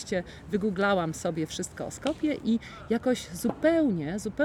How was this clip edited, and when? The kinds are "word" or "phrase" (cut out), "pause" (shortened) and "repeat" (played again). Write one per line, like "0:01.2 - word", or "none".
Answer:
none